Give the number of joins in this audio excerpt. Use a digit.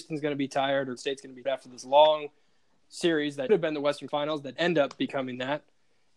5